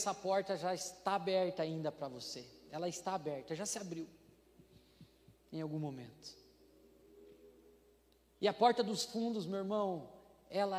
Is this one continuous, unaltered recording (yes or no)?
yes